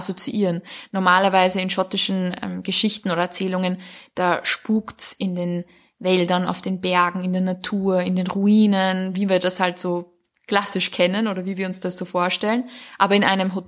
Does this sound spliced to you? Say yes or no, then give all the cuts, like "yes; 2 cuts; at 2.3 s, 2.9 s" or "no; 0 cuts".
no; 0 cuts